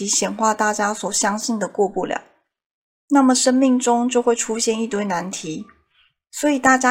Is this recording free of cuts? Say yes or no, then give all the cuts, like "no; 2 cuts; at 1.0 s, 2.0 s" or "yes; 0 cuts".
yes; 0 cuts